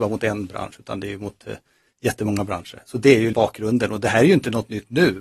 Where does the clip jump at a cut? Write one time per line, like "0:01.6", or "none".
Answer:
0:03.3